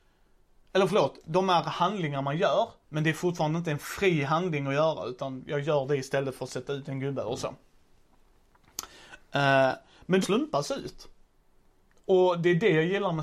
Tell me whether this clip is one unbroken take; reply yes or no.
no